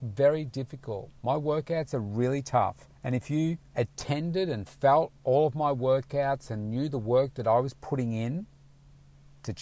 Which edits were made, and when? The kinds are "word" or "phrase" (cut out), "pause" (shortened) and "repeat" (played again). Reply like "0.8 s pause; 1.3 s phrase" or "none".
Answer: 1.2 s pause; 3.0 s pause; 3.6 s pause